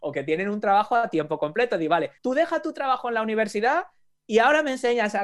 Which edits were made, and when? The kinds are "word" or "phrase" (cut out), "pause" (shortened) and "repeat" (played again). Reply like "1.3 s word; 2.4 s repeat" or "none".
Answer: 2.2 s pause